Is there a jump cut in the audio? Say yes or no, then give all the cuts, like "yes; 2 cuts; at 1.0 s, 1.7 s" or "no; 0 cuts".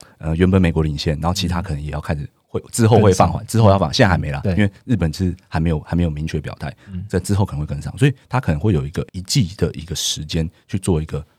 yes; 1 cut; at 9.1 s